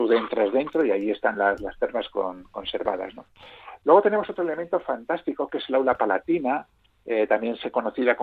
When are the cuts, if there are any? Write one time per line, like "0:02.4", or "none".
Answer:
none